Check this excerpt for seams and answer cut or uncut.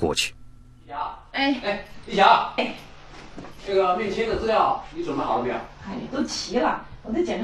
cut